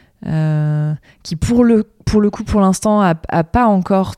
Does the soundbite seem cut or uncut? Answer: uncut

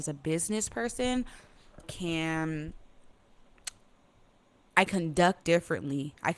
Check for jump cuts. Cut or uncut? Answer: cut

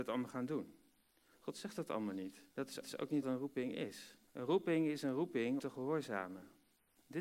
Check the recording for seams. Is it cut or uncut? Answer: cut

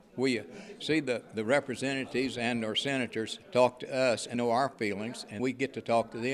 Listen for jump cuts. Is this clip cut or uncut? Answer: cut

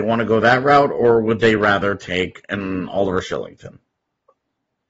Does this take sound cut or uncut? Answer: uncut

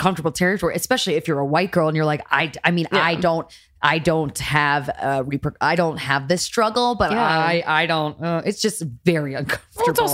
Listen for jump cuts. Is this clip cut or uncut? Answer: uncut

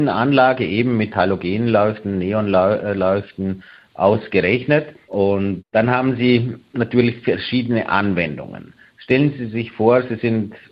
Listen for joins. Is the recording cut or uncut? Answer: uncut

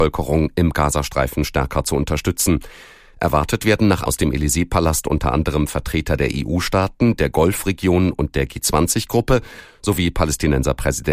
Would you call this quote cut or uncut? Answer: cut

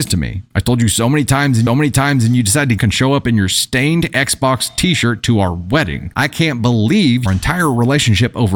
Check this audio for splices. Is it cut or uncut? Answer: cut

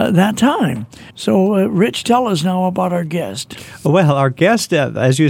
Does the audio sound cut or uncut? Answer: cut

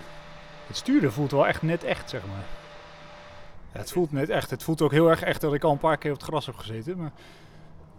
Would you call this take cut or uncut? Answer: uncut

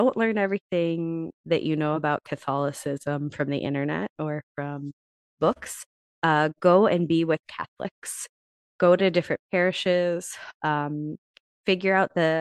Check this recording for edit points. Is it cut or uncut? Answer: uncut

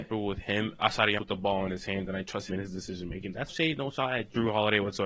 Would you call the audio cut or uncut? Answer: cut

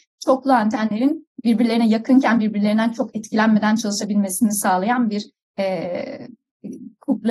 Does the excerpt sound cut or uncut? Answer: uncut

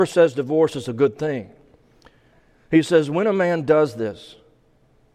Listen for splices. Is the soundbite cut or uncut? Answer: uncut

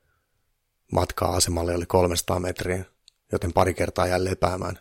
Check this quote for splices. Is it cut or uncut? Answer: uncut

